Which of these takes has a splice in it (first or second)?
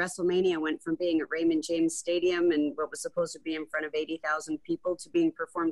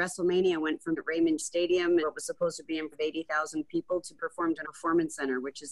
second